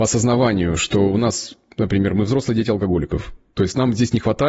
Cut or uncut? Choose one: uncut